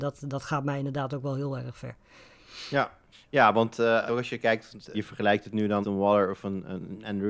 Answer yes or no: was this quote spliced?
yes